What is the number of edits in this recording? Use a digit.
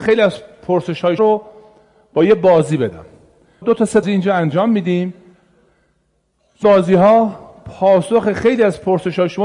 4